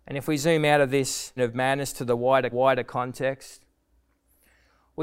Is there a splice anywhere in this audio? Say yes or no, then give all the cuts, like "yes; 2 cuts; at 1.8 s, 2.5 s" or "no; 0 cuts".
yes; 2 cuts; at 1.4 s, 2.5 s